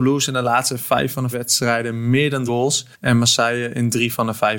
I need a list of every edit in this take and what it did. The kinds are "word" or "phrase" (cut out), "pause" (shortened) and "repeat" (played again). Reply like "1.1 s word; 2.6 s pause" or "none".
1.3 s word; 2.5 s word; 2.9 s pause